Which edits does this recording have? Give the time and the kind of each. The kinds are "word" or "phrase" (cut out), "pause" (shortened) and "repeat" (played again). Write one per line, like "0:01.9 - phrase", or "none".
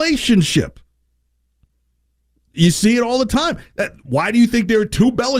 none